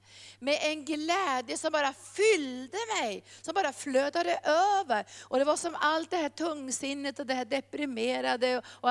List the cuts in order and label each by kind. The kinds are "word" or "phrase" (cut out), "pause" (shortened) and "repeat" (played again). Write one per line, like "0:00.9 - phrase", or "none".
none